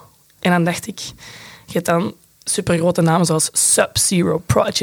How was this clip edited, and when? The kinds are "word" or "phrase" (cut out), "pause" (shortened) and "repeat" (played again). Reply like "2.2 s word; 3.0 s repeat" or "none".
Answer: none